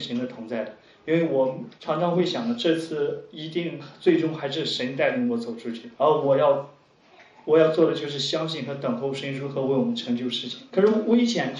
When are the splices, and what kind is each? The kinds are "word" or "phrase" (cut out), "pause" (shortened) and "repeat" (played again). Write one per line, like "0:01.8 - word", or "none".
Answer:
0:01.8 - pause
0:05.9 - pause
0:10.7 - pause